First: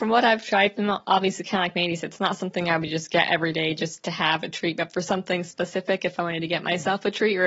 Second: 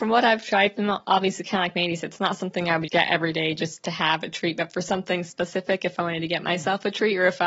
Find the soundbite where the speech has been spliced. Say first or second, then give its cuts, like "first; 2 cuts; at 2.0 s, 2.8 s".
second; 1 cut; at 2.9 s